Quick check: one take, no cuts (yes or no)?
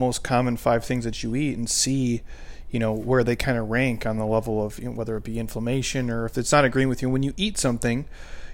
yes